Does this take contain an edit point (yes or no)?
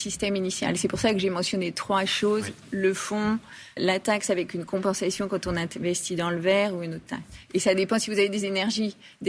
yes